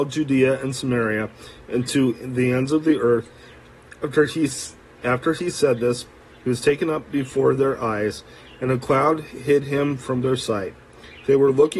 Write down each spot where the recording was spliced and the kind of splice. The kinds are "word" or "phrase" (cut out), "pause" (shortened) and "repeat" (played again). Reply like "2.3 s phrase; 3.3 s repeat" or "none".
none